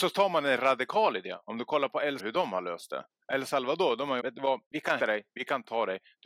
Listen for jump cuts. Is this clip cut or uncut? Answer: cut